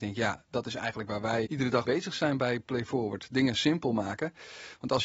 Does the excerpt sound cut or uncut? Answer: cut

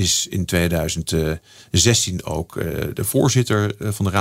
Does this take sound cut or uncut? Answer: cut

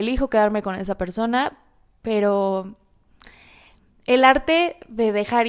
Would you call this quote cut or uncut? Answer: uncut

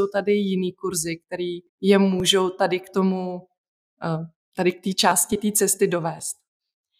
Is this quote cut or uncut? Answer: cut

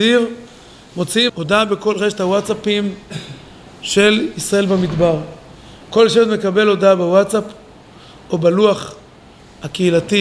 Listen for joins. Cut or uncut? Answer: cut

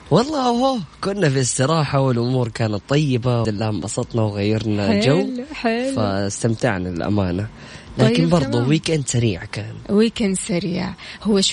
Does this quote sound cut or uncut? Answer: cut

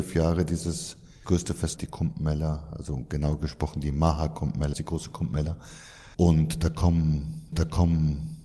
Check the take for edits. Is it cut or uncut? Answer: cut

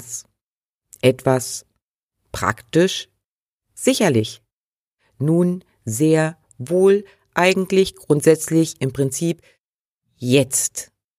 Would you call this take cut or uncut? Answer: uncut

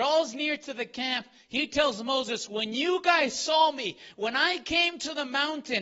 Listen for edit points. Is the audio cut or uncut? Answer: uncut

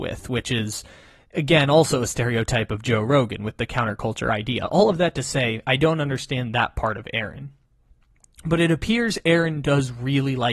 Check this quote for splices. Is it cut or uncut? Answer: uncut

